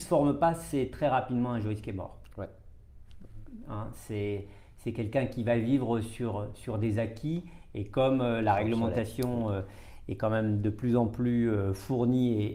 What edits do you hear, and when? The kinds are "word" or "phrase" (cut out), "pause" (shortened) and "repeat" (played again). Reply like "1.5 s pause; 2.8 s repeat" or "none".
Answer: none